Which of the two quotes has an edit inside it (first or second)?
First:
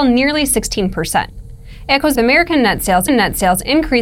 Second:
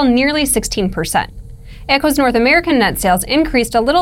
first